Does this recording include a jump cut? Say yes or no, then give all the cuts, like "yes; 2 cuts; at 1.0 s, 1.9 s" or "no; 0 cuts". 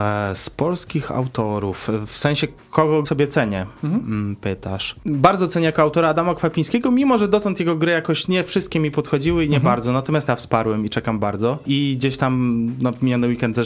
yes; 3 cuts; at 3.0 s, 8.3 s, 10.3 s